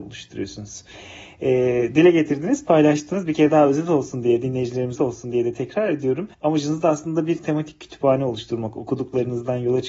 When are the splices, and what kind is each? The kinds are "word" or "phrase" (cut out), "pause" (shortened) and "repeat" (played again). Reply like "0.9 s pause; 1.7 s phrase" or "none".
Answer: 5.0 s word; 6.3 s pause